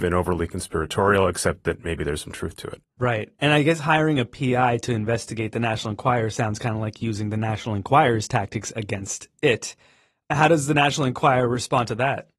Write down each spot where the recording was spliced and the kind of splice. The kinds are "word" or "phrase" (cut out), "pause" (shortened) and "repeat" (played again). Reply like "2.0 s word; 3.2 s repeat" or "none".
none